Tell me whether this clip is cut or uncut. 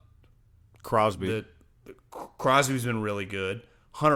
uncut